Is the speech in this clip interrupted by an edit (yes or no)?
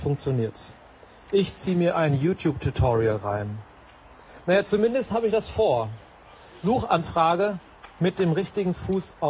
yes